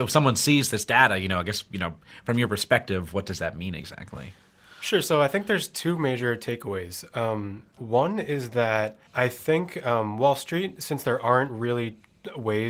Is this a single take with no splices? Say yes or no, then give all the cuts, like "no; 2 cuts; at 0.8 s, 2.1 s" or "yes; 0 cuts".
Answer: no; 1 cut; at 9.1 s